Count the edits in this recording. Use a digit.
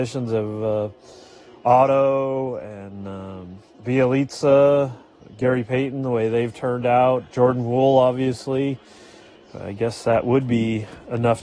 1